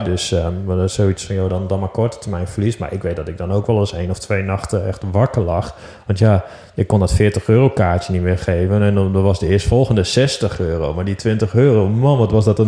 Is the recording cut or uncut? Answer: uncut